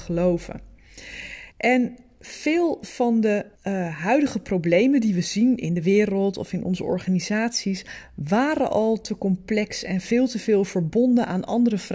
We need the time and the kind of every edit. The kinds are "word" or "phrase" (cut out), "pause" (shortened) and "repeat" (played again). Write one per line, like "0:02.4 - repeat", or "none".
0:01.5 - pause
0:03.5 - pause